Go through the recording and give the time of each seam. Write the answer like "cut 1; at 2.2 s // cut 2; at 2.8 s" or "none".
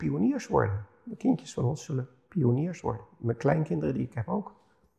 none